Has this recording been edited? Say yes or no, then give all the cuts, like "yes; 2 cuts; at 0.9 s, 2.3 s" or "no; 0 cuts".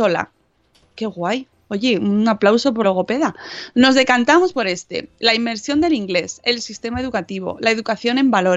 yes; 2 cuts; at 1.5 s, 2.8 s